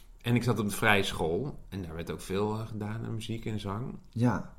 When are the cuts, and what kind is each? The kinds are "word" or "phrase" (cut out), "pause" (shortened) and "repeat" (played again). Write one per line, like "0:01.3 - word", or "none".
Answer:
none